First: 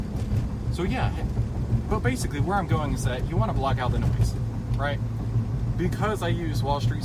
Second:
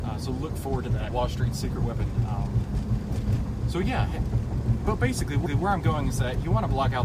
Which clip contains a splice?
second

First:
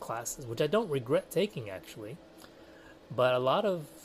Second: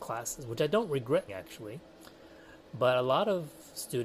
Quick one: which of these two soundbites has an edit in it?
second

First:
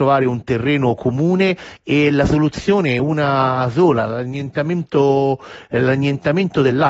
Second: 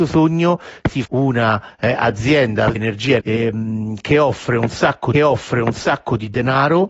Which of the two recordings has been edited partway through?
second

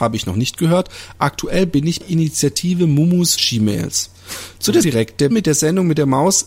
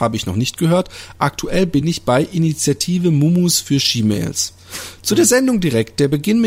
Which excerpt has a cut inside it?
first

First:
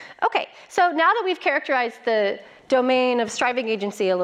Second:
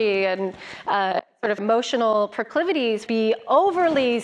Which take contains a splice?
second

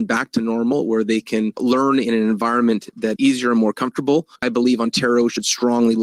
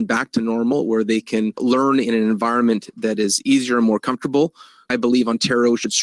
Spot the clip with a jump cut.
first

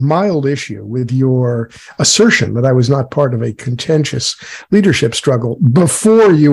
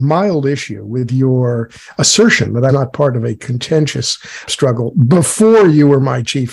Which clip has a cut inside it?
second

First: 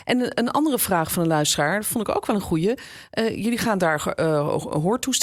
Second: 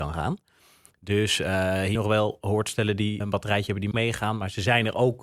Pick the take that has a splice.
second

